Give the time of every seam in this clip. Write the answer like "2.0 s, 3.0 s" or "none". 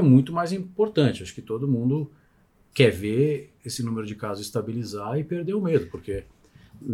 none